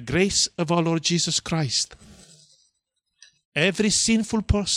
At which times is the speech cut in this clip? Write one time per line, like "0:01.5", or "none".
none